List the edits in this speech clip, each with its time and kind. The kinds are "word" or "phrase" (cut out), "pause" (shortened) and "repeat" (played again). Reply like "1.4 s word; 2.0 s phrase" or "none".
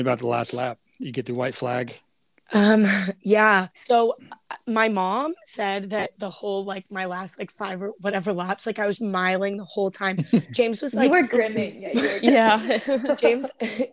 3.7 s pause; 9.0 s word